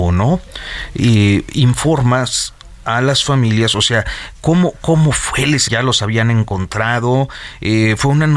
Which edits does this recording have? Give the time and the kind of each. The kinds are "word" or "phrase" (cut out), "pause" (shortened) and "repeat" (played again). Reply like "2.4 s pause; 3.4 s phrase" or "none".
5.7 s phrase